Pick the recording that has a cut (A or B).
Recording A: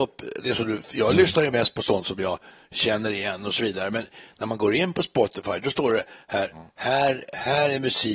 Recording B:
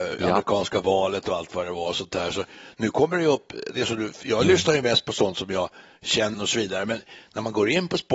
B